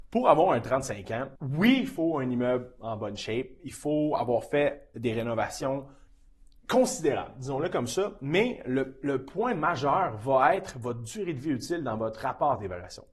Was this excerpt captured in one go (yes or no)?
no